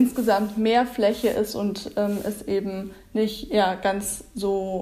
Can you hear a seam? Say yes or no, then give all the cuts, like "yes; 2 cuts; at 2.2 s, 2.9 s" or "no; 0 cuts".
no; 0 cuts